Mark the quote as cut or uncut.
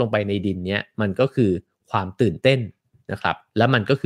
uncut